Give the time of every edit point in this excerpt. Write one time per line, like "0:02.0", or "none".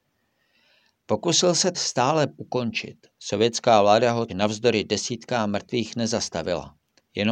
0:01.7
0:02.3
0:03.1
0:04.3